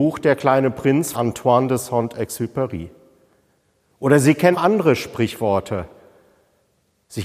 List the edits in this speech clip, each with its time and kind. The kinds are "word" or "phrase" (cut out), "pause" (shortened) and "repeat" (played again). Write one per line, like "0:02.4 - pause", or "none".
0:01.1 - word
0:04.5 - word